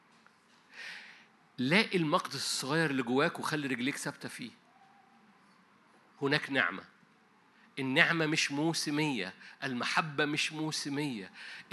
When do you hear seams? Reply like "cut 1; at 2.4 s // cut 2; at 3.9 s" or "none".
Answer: cut 1; at 6.1 s